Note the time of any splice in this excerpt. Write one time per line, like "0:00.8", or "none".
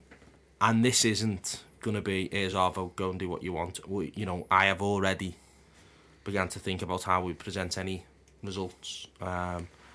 none